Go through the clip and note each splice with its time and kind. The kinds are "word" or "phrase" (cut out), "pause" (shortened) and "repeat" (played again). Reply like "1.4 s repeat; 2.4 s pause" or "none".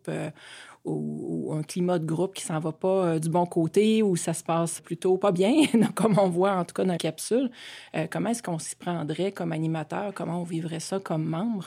4.8 s word; 7.0 s phrase